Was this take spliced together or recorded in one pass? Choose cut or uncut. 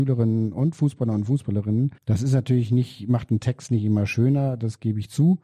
cut